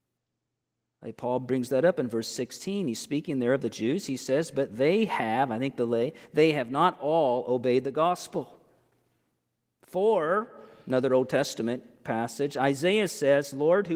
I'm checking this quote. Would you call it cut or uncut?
uncut